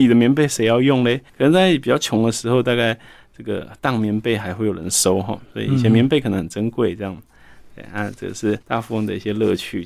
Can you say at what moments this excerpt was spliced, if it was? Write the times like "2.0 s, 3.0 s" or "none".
1.3 s, 8.6 s